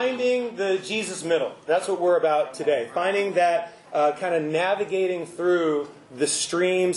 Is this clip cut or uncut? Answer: uncut